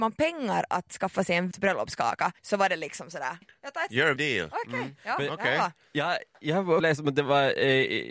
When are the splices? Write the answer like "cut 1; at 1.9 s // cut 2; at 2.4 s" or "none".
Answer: cut 1; at 1.5 s // cut 2; at 2.4 s // cut 3; at 3.4 s // cut 4; at 4.2 s // cut 5; at 6.8 s